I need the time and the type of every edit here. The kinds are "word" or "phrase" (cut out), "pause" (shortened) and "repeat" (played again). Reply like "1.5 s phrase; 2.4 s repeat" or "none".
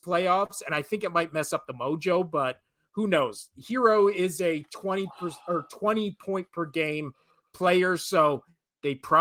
none